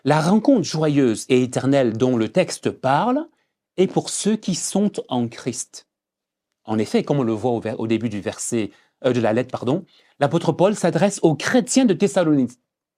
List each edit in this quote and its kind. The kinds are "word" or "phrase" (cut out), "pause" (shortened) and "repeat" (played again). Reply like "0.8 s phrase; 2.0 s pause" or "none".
none